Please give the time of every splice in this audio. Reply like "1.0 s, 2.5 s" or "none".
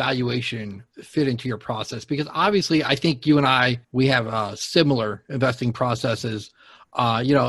0.9 s, 3.8 s